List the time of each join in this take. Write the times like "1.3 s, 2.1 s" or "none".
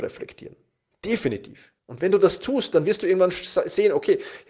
1.8 s